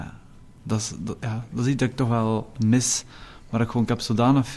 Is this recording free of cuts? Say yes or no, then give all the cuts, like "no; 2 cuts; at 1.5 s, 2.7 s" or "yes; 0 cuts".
yes; 0 cuts